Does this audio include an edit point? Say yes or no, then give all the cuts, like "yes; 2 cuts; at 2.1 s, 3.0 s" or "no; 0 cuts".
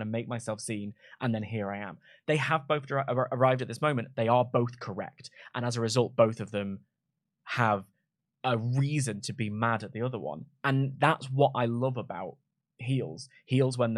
no; 0 cuts